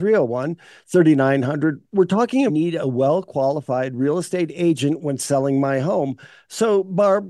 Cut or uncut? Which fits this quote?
cut